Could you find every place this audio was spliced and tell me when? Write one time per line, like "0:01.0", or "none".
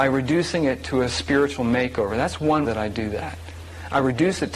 0:02.6